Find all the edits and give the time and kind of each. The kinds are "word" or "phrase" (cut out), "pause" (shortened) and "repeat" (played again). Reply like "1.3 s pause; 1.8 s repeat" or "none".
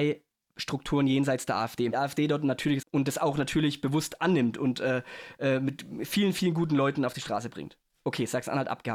1.9 s phrase; 2.8 s phrase